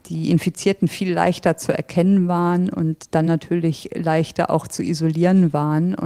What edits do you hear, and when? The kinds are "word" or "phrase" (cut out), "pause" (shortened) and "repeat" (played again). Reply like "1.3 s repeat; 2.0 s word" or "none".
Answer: none